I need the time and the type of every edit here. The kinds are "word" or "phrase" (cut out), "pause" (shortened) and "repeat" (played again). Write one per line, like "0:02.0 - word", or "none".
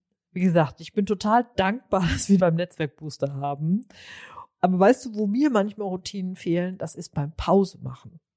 0:02.4 - word